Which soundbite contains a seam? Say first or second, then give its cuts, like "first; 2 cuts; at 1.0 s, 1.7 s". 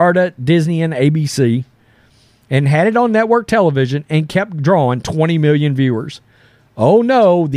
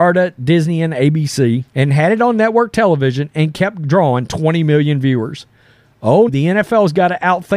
second; 2 cuts; at 1.7 s, 6.3 s